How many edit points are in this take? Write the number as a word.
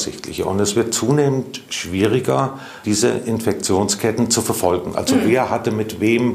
one